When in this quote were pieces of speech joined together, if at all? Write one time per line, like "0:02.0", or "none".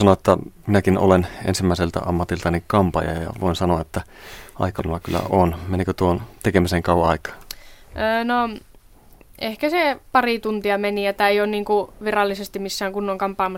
0:04.8

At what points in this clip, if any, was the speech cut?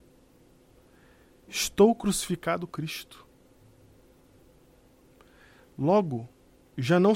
0:02.7

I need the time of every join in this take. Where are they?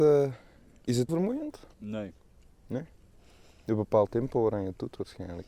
0:01.1
0:01.7
0:04.1

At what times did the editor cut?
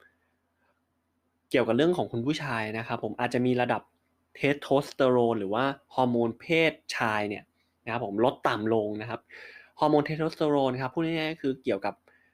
none

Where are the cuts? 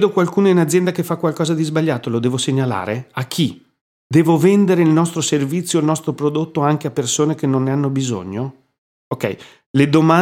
none

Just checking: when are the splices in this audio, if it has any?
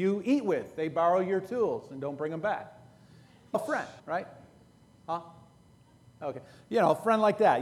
0:03.5
0:04.0

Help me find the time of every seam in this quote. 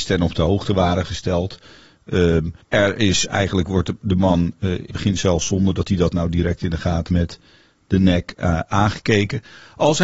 0:02.6
0:04.9
0:07.1

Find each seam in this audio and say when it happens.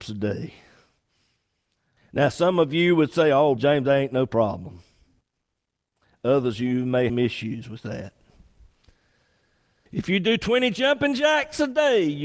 0:03.6
0:07.1

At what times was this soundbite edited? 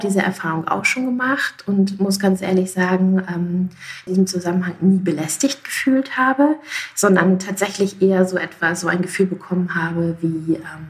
0:04.1

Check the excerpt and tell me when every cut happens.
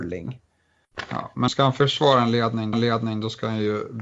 0:01.5
0:02.7

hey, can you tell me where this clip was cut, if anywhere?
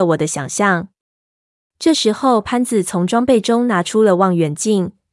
none

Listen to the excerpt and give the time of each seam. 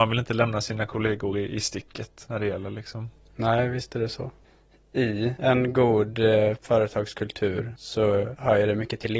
none

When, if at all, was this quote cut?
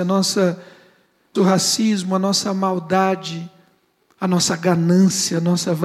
0:01.4

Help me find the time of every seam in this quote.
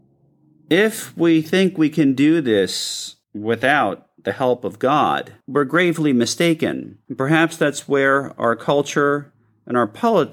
0:03.2
0:05.4
0:07.1

